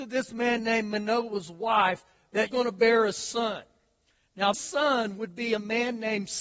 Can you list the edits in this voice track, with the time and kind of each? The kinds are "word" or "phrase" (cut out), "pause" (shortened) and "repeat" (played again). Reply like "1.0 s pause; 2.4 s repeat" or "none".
2.5 s word; 4.5 s word